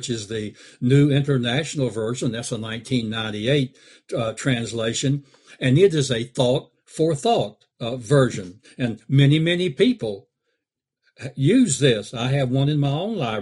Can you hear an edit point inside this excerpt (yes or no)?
yes